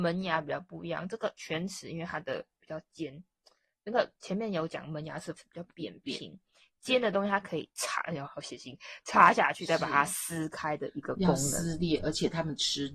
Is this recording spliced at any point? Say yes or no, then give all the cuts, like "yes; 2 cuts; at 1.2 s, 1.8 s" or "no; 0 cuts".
yes; 3 cuts; at 5.3 s, 7.7 s, 8.2 s